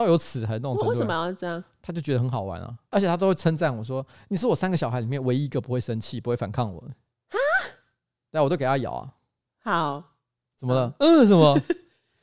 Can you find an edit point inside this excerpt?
yes; 1 cut; at 10.5 s

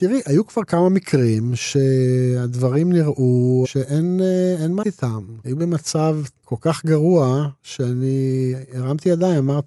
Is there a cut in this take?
yes; 1 cut; at 4.8 s

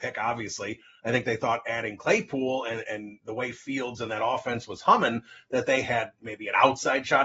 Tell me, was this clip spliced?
no; 0 cuts

